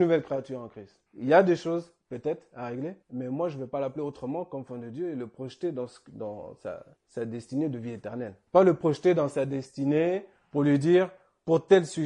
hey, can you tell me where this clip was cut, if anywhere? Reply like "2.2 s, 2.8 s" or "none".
1.1 s, 2.0 s, 3.0 s, 7.0 s, 8.5 s